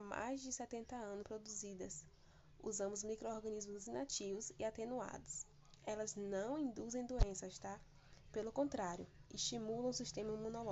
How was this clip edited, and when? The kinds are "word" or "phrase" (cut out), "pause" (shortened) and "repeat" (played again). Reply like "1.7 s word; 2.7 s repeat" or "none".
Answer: 1.2 s word